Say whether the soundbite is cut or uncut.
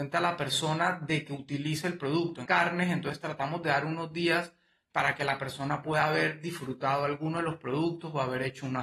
cut